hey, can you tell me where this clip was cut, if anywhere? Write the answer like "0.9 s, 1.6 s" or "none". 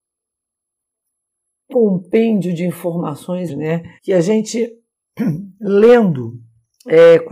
1.7 s, 3.5 s, 4.0 s